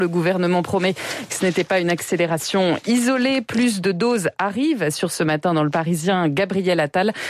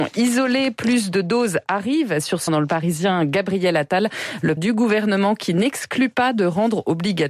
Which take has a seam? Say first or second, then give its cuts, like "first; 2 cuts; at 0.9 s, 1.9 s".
second; 2 cuts; at 2.5 s, 4.6 s